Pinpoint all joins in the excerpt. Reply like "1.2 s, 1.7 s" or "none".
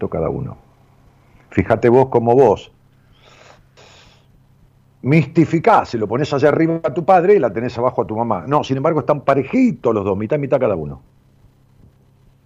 none